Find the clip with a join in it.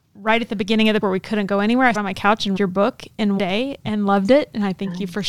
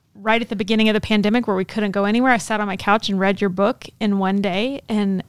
first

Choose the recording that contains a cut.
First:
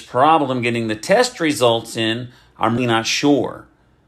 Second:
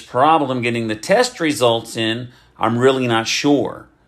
first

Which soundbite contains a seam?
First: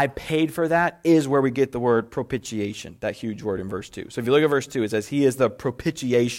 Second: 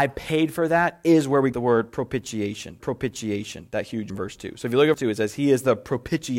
second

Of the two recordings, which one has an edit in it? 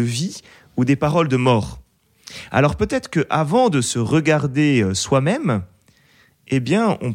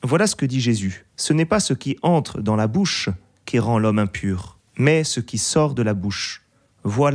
second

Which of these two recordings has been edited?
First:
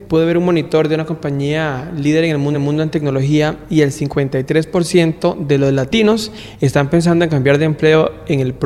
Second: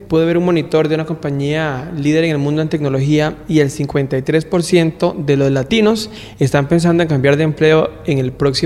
first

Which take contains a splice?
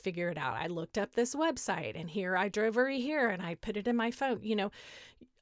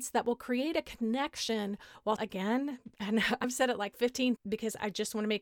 second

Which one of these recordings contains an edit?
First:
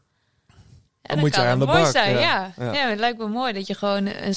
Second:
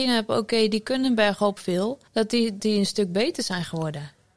second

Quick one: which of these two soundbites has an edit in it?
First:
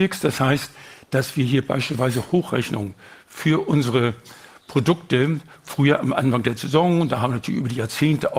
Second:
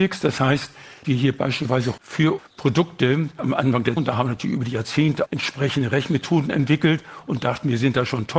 second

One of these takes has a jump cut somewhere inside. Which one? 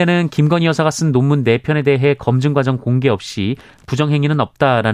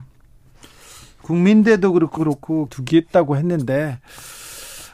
second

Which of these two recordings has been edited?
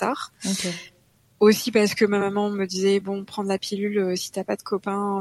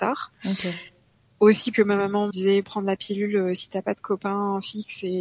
second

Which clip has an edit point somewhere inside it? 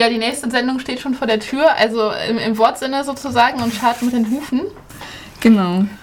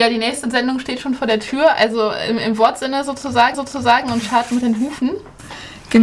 second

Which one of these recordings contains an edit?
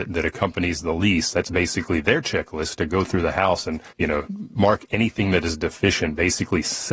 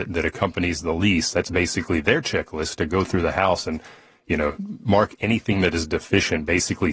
first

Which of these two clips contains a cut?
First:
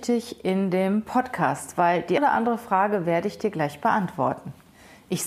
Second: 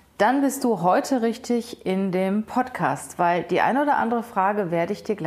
first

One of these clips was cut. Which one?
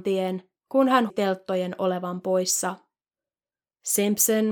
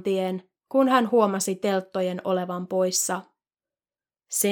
first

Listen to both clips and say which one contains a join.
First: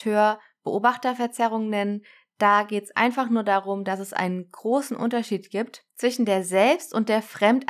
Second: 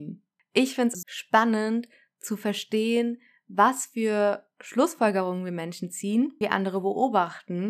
second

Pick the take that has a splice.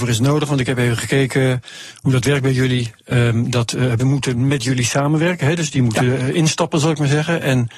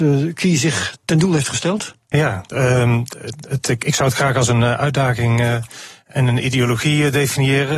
first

